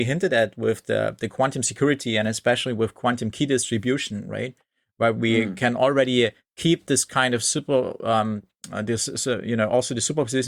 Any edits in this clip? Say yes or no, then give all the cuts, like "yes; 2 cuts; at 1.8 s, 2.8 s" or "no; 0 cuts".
no; 0 cuts